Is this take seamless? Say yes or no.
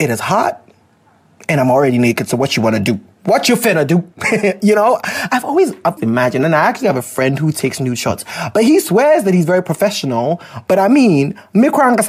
no